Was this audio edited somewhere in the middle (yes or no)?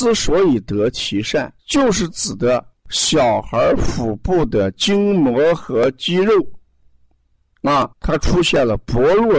yes